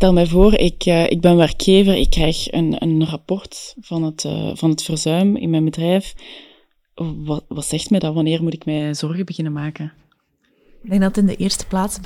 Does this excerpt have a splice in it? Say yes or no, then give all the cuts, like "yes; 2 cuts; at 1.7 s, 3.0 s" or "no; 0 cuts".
no; 0 cuts